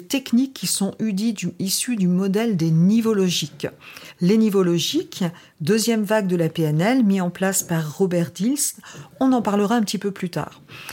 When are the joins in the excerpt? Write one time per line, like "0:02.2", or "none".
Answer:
none